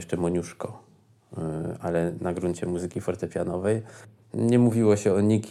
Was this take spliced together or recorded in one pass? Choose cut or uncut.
uncut